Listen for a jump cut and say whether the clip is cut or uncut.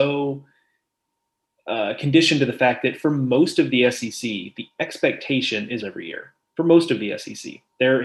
cut